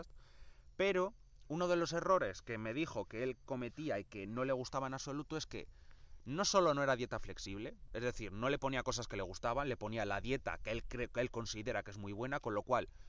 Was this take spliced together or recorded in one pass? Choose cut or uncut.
uncut